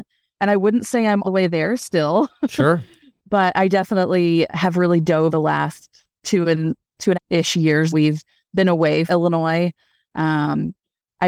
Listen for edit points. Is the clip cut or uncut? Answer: cut